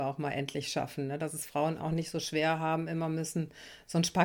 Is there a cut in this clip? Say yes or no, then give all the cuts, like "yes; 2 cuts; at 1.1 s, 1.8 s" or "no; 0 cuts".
no; 0 cuts